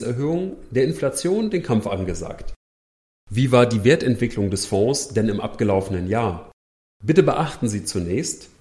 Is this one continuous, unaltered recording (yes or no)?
yes